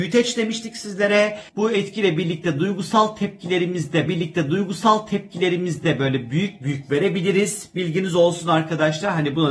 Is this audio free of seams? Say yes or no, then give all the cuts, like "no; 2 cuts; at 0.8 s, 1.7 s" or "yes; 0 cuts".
no; 2 cuts; at 1.5 s, 4.1 s